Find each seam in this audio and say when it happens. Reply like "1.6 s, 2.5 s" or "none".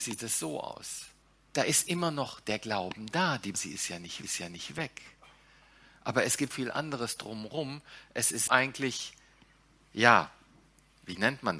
1.2 s, 3.5 s, 4.2 s, 6.5 s, 8.5 s